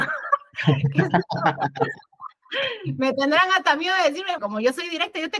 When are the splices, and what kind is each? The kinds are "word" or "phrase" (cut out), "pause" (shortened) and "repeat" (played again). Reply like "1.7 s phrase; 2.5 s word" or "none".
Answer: 4.4 s word